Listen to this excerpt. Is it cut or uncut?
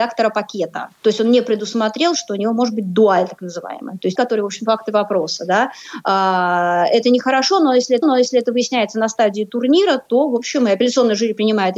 cut